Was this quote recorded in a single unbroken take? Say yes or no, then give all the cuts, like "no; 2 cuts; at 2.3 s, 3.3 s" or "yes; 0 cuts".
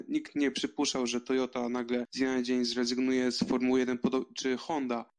yes; 0 cuts